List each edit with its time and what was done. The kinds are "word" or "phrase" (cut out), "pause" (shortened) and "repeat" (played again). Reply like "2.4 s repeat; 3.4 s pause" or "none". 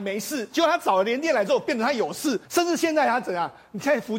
2.4 s pause

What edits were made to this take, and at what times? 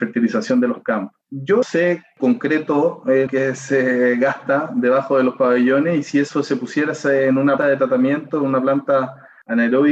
1.6 s word; 2.2 s word; 3.3 s word; 7.6 s word

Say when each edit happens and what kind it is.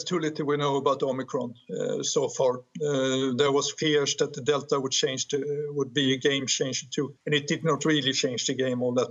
7.2 s pause

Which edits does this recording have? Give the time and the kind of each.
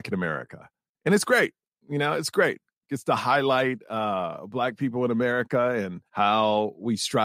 6.1 s pause

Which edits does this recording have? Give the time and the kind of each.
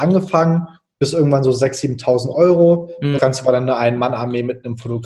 3.2 s word

